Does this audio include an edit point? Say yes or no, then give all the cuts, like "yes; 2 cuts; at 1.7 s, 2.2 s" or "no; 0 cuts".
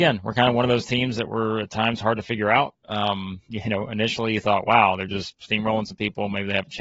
no; 0 cuts